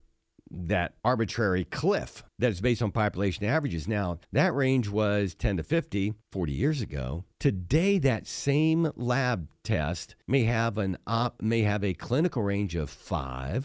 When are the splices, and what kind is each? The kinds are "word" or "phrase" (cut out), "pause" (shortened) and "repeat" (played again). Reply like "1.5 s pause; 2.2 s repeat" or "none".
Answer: 1.0 s pause; 2.3 s pause; 4.2 s pause; 6.2 s pause; 7.3 s pause; 10.2 s pause